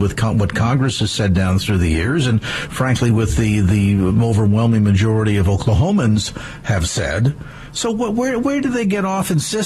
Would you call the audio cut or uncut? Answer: uncut